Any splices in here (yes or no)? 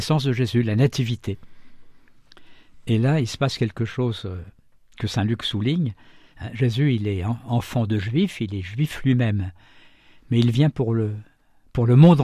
no